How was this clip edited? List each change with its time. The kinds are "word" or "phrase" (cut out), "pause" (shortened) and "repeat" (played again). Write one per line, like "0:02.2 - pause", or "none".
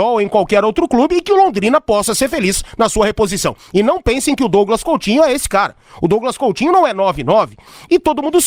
none